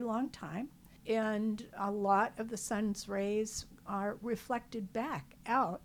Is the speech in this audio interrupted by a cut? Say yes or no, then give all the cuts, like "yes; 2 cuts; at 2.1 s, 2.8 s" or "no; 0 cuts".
yes; 1 cut; at 1.0 s